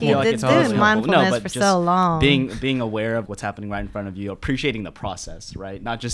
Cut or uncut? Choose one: cut